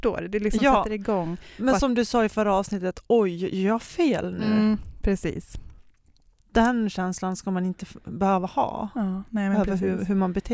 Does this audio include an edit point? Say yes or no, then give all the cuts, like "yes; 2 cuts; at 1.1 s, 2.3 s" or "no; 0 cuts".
no; 0 cuts